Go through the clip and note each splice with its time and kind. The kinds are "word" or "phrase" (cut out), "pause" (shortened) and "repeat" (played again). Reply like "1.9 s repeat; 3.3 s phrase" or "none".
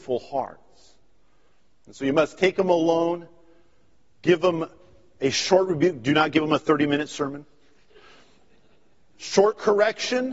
none